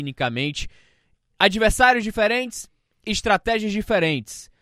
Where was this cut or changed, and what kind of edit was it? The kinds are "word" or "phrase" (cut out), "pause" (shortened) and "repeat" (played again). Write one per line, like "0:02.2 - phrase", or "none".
none